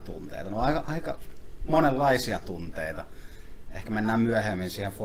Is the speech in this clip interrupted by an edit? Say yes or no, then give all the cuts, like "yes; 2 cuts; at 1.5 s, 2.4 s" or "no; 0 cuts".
no; 0 cuts